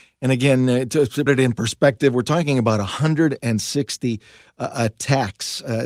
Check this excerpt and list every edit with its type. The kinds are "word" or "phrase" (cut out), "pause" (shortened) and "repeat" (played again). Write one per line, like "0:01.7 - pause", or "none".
0:01.3 - word

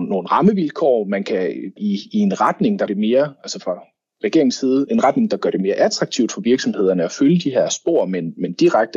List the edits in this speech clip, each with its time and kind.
0:01.8 - word
0:02.9 - word
0:04.9 - word

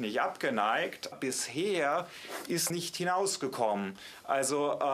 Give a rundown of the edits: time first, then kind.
0:01.1 - word
0:02.7 - phrase

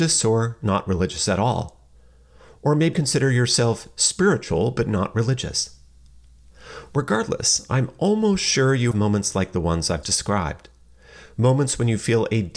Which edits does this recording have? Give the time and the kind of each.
0:02.9 - word
0:08.9 - word
0:10.0 - word

